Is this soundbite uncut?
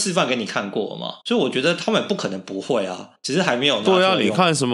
no; 2 cuts; at 1.2 s, 3.2 s

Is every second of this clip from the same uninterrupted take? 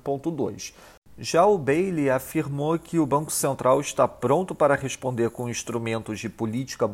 yes; 0 cuts

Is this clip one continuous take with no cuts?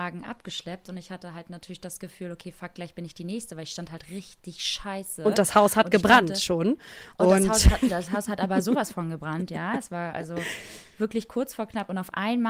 yes; 0 cuts

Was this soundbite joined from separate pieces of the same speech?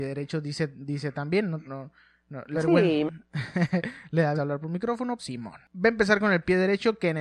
yes; 5 cuts; at 1.6 s, 2.5 s, 4.3 s, 5.2 s, 5.7 s

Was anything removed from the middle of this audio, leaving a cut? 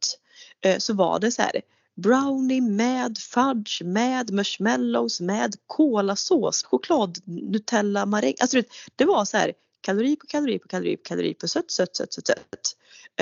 yes; 1 cut; at 6.6 s

